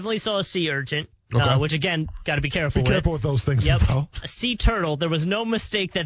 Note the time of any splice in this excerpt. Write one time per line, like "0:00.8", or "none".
0:04.2